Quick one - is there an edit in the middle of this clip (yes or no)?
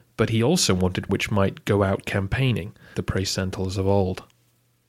yes